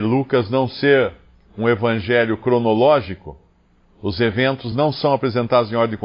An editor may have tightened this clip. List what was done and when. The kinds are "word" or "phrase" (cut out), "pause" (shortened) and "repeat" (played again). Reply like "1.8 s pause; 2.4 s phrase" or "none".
none